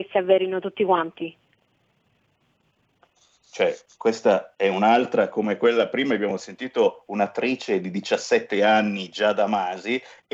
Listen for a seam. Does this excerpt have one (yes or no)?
no